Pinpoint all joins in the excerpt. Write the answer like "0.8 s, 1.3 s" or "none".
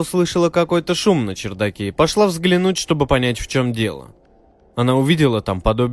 none